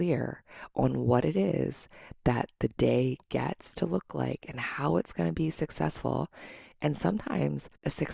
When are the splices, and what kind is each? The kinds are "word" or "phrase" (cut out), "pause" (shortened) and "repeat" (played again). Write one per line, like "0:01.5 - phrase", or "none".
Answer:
none